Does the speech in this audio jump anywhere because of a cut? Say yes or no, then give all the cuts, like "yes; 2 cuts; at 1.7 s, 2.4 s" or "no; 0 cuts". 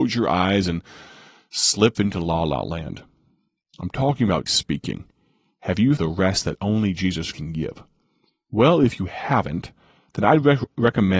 yes; 4 cuts; at 1.9 s, 4.5 s, 6.0 s, 7.3 s